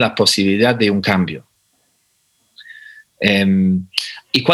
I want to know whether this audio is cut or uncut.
uncut